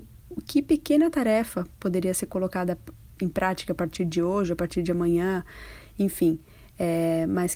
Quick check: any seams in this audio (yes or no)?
no